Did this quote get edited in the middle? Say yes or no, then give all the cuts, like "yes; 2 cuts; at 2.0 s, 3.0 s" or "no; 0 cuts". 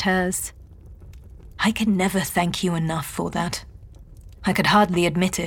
no; 0 cuts